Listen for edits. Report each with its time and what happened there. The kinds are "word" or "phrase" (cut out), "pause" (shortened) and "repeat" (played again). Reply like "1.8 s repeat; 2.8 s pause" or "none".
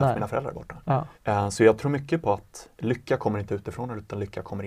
1.1 s pause; 2.7 s pause

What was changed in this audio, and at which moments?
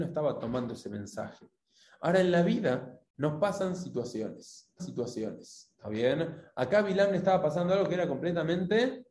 3.1 s pause; 4.8 s repeat

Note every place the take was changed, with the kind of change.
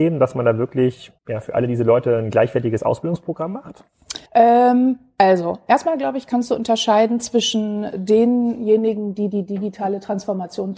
1.2 s pause; 4.3 s pause

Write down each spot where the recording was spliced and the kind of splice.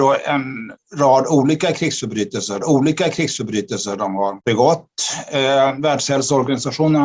2.6 s repeat

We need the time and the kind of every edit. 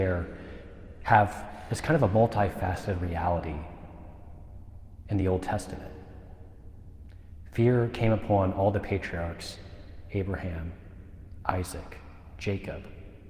none

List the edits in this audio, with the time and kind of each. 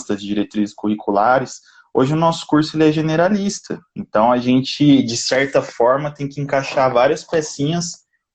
3.9 s pause

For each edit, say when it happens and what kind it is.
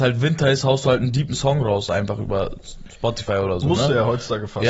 none

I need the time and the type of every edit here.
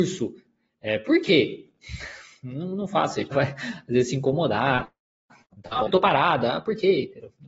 3.3 s phrase; 5.5 s pause; 5.9 s word

